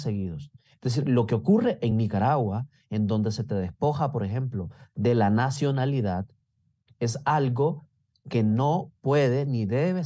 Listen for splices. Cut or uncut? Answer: uncut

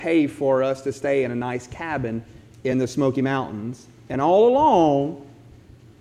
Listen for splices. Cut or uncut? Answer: uncut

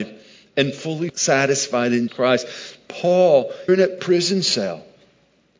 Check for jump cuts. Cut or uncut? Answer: cut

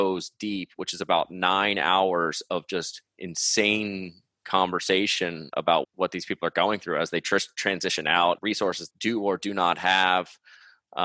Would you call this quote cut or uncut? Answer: cut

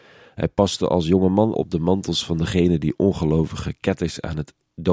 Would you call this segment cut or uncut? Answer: cut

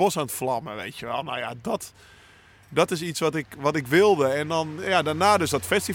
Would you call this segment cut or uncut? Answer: uncut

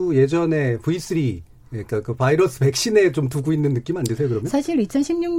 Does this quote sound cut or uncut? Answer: uncut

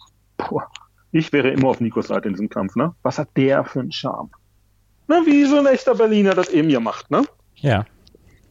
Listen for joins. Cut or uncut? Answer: uncut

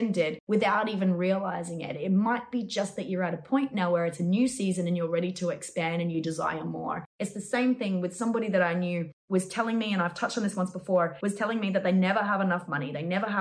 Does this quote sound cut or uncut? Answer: uncut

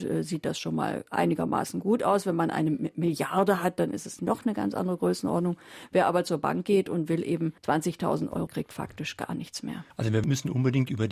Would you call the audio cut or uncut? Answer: cut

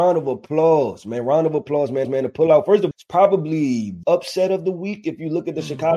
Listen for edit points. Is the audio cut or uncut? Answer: cut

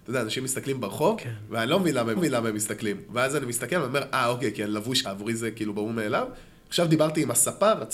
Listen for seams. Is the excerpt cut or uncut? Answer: cut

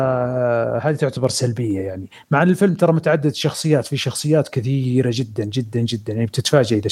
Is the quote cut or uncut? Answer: uncut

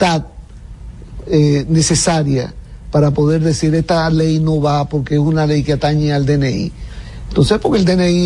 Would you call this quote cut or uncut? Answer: uncut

